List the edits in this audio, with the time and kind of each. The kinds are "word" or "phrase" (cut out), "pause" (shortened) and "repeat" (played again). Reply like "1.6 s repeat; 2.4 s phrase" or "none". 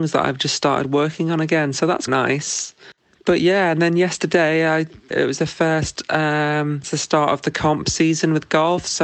2.1 s word; 5.1 s word; 6.8 s word